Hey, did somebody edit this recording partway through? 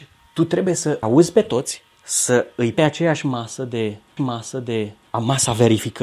yes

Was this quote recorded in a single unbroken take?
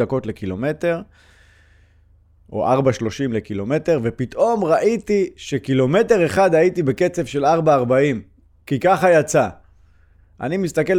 yes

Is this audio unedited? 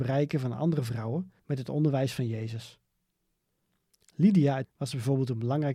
no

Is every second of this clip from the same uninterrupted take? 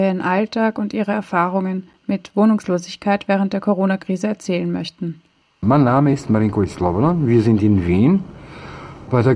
yes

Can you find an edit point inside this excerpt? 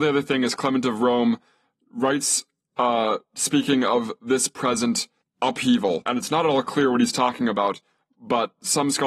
no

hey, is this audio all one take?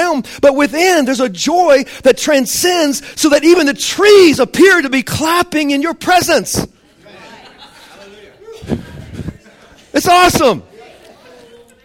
yes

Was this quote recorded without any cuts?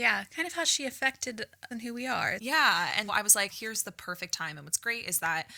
no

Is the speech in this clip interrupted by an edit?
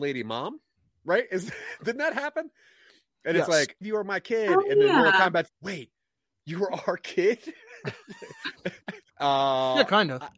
yes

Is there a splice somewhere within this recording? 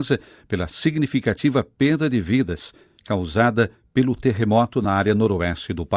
no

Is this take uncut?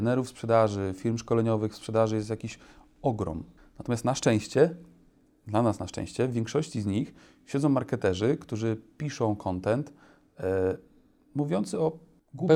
no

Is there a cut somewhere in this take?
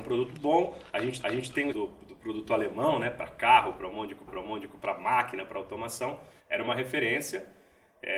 yes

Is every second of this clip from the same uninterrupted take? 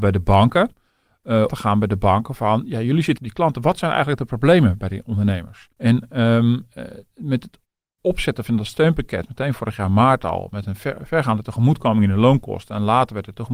no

